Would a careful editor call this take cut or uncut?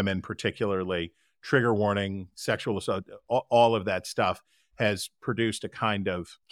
uncut